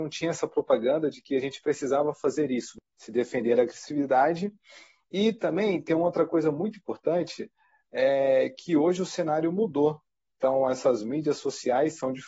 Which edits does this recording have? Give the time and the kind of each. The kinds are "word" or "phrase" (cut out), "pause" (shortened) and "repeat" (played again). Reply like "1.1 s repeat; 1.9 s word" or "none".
none